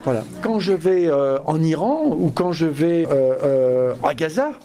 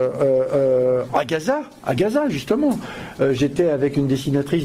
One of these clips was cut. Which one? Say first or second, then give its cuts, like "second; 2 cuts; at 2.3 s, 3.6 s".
first; 1 cut; at 3.0 s